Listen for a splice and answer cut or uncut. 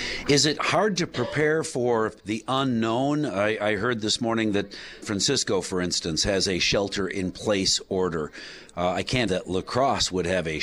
cut